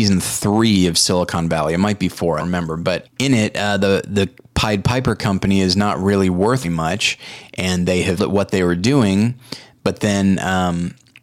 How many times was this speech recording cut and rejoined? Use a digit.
4